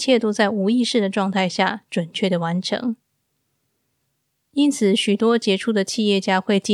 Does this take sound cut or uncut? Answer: uncut